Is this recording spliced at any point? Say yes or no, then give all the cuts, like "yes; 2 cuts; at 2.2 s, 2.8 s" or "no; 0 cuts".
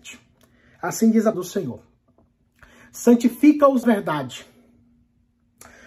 yes; 2 cuts; at 1.3 s, 3.8 s